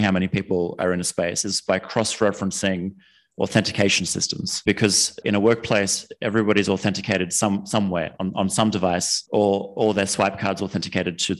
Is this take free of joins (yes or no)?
yes